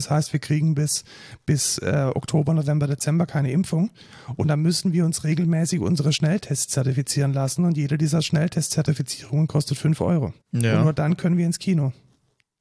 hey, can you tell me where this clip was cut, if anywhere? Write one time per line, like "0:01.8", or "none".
0:10.4

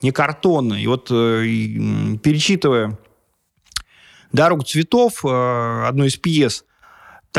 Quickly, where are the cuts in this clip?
none

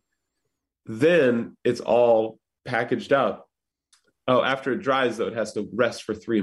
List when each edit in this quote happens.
0:03.9

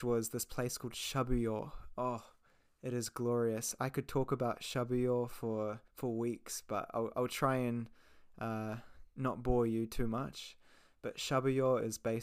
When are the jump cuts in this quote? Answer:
0:05.9

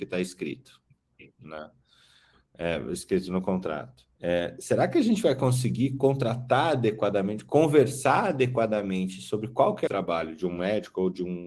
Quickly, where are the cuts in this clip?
0:04.2
0:09.9

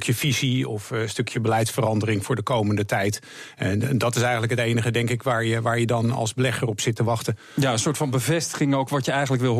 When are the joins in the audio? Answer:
none

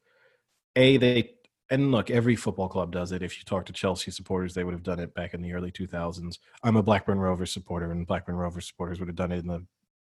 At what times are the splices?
none

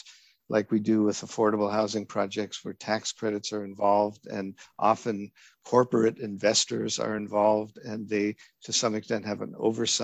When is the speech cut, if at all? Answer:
none

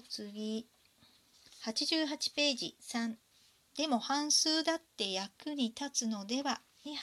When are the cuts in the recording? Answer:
0:02.8

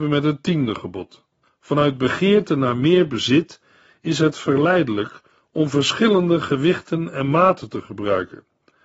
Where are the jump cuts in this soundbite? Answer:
0:01.4

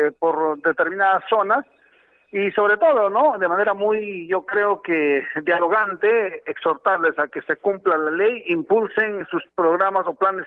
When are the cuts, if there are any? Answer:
0:09.2

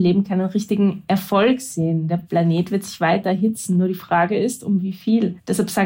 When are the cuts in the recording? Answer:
none

